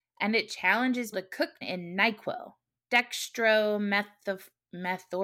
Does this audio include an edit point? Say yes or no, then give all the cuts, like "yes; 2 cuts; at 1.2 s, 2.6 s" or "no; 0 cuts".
yes; 3 cuts; at 1.1 s, 1.6 s, 2.8 s